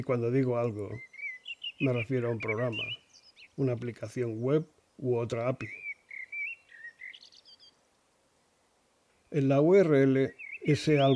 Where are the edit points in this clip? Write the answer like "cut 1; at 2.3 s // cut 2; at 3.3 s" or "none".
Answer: none